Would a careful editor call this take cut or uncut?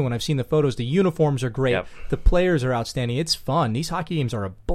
uncut